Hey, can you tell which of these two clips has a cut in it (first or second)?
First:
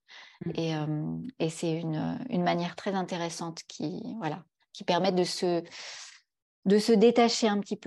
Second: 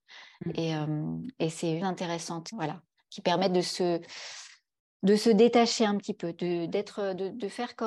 second